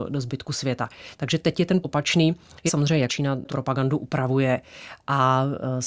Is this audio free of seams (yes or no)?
no